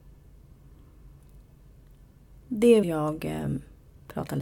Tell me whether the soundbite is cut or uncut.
cut